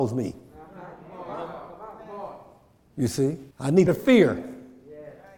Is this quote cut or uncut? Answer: cut